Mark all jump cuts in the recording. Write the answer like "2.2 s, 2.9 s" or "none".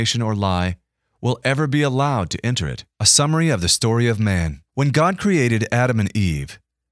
2.9 s, 4.7 s